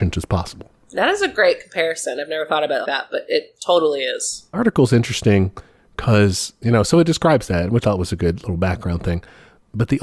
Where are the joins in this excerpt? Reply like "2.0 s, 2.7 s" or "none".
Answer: 2.8 s, 4.5 s, 7.8 s